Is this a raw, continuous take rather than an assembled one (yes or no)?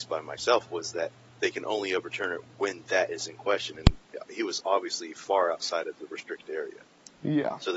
yes